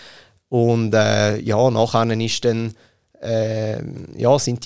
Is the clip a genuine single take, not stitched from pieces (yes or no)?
yes